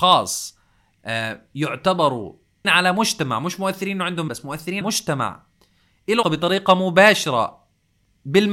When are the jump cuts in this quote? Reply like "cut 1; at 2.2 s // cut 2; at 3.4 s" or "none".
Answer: cut 1; at 2.6 s // cut 2; at 4.3 s // cut 3; at 4.8 s // cut 4; at 6.2 s